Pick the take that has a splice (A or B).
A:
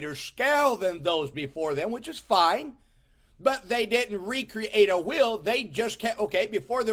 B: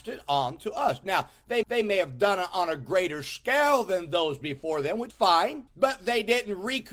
B